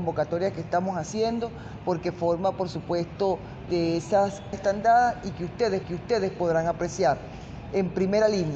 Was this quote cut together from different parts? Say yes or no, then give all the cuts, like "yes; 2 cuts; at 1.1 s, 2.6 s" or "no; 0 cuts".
yes; 3 cuts; at 3.7 s, 4.5 s, 5.8 s